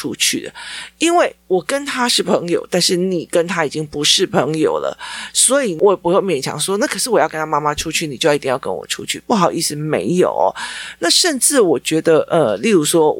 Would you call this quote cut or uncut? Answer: uncut